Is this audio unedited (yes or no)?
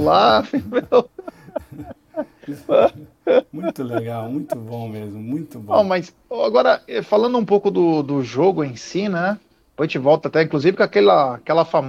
yes